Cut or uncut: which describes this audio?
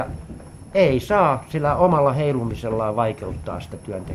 uncut